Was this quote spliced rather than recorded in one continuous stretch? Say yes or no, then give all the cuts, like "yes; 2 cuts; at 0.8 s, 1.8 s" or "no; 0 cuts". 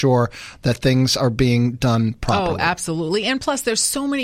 no; 0 cuts